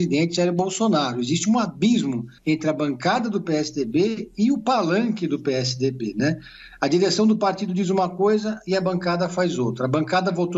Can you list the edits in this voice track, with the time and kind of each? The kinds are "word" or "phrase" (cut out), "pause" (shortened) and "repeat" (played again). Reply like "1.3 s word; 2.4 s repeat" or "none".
2.4 s pause